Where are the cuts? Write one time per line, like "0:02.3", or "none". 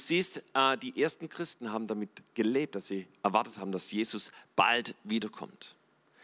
none